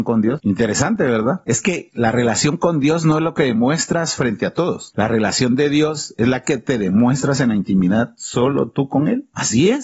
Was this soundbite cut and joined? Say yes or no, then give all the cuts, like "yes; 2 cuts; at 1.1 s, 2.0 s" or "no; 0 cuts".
no; 0 cuts